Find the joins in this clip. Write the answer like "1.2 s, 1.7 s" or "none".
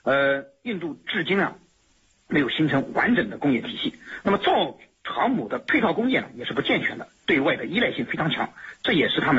none